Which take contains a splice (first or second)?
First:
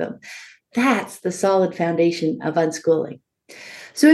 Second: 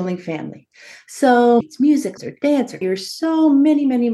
second